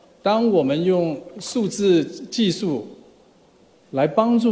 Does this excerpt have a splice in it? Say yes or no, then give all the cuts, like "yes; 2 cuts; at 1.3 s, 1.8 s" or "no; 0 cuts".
no; 0 cuts